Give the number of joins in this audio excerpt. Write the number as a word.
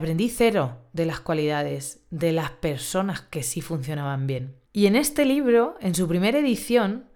one